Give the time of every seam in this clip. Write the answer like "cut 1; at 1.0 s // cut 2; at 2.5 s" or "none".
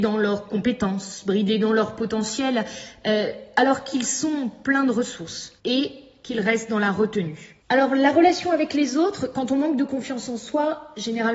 cut 1; at 5.6 s // cut 2; at 7.6 s